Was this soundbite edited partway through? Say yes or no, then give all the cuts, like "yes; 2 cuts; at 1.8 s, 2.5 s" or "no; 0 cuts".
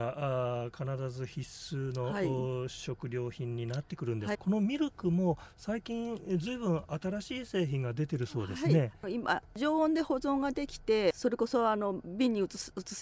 yes; 1 cut; at 4.3 s